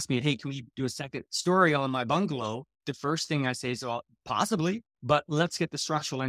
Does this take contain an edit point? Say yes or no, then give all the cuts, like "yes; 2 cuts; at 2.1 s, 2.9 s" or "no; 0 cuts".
yes; 1 cut; at 2.7 s